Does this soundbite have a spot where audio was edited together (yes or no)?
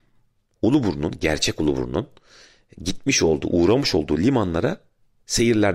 no